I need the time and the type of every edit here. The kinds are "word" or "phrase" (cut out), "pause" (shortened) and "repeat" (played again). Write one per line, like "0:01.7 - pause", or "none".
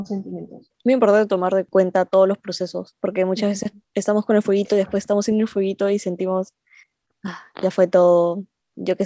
none